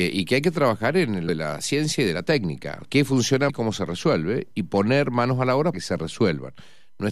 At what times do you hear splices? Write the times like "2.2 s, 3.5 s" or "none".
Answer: 1.3 s, 2.8 s, 3.5 s, 5.7 s